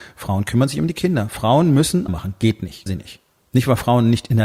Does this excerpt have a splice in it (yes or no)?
yes